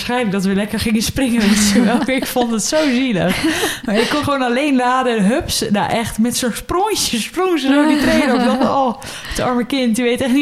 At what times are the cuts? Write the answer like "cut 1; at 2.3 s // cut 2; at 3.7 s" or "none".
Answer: cut 1; at 4.2 s